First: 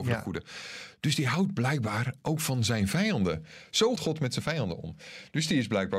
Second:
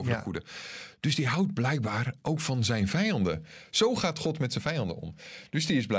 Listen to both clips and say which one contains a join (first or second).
first